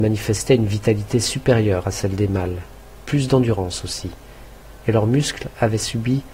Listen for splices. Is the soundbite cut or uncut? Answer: uncut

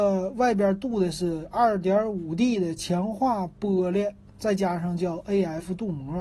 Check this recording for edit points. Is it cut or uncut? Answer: uncut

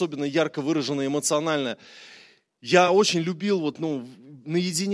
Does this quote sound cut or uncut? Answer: uncut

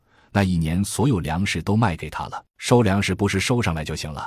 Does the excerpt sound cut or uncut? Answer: cut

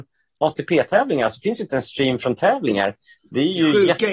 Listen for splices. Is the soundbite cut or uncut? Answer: cut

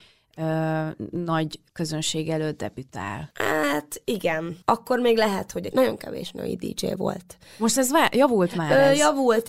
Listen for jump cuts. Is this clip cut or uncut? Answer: cut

